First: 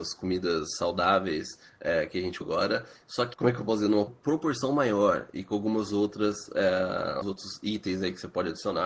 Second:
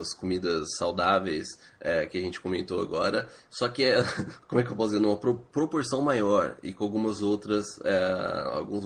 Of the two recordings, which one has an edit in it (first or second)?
first